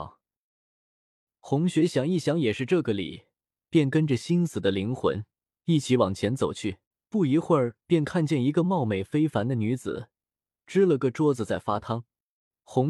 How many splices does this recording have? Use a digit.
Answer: 1